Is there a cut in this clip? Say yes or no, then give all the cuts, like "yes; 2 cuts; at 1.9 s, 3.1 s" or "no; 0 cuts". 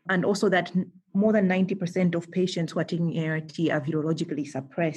no; 0 cuts